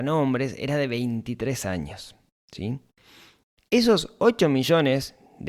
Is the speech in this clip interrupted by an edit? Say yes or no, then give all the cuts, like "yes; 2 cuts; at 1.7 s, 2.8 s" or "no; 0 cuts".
no; 0 cuts